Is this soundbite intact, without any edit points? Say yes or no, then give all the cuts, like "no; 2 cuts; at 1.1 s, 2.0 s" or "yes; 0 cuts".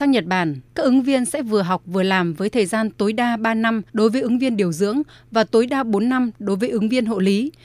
no; 1 cut; at 3.9 s